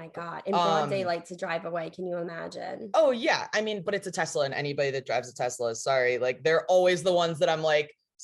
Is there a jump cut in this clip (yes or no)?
no